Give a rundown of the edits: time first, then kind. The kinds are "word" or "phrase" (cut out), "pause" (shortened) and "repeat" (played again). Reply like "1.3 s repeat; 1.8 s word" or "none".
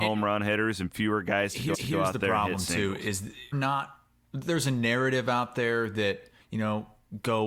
1.7 s repeat; 3.5 s word; 6.4 s pause